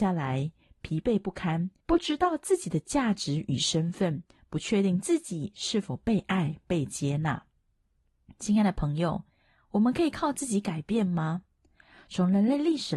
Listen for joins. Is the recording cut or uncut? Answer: cut